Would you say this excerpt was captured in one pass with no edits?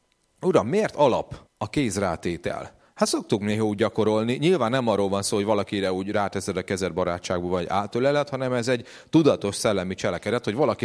no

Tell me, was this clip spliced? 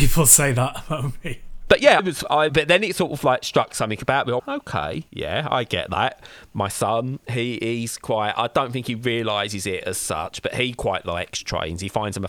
yes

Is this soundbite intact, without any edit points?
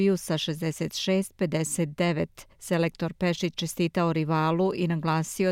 no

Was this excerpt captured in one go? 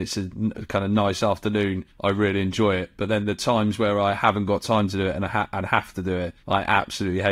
no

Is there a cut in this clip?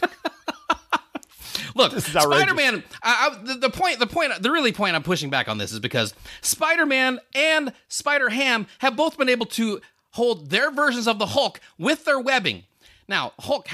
no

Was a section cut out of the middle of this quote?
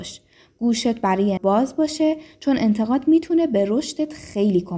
yes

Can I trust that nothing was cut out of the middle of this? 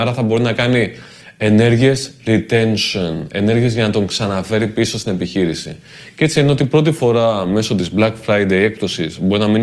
yes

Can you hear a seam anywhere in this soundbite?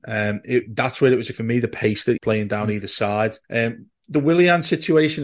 yes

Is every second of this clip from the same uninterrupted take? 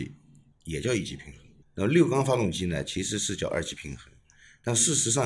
no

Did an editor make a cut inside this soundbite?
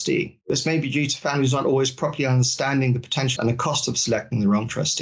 yes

